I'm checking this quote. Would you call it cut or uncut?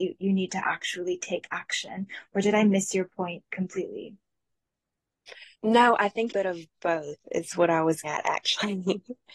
cut